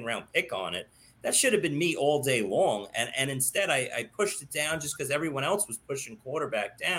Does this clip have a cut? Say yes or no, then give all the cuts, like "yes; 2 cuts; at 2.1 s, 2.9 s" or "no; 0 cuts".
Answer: no; 0 cuts